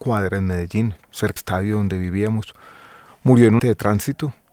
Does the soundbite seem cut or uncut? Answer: cut